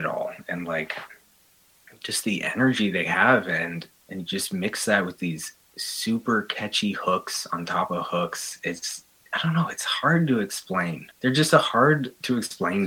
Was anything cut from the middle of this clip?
yes; 2 cuts; at 4.0 s, 11.1 s

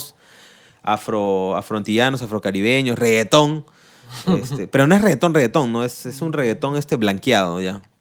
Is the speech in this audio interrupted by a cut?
no; 0 cuts

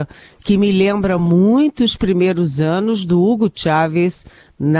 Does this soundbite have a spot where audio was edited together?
no; 0 cuts

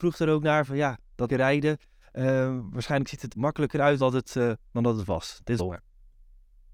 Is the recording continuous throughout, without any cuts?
no; 5 cuts; at 1.3 s, 3.3 s, 4.0 s, 4.6 s, 5.6 s

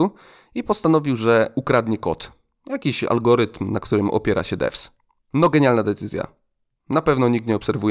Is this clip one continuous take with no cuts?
yes; 0 cuts

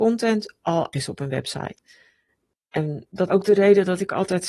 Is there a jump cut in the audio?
yes; 2 cuts; at 0.9 s, 3.3 s

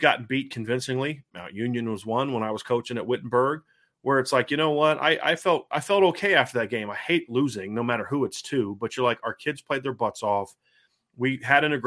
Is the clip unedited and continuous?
yes; 0 cuts

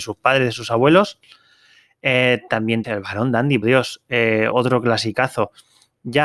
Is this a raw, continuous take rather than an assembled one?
no; 3 cuts; at 2.8 s, 3.6 s, 4.5 s

